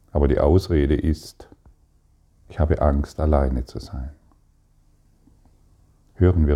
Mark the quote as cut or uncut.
uncut